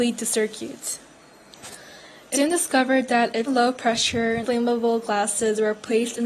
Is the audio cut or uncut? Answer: cut